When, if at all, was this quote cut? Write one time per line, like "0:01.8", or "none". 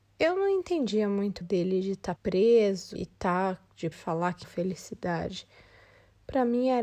0:01.4
0:02.2
0:03.0
0:03.9
0:04.4